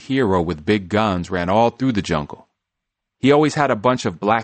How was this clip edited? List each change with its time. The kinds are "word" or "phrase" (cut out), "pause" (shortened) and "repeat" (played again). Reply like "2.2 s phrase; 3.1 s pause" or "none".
none